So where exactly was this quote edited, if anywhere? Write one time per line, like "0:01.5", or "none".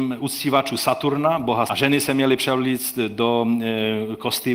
0:01.7

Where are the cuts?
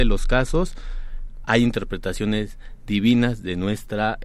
0:01.4

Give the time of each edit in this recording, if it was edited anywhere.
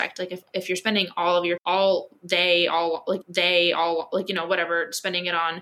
0:01.6
0:03.2

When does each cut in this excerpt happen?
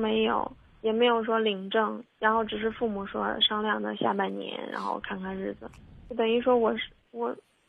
0:02.1

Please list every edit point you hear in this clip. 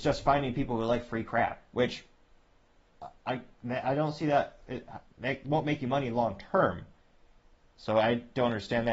0:01.7

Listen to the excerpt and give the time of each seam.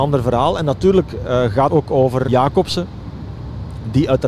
0:01.7
0:02.3

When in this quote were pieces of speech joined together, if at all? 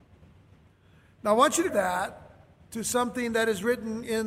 0:01.7

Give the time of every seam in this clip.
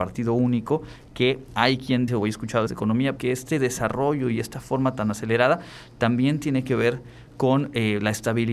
0:02.1
0:02.7
0:03.2

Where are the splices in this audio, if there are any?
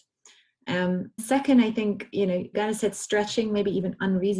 0:01.2
0:02.5

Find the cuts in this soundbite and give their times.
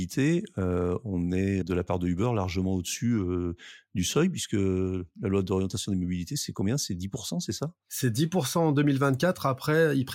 0:01.6

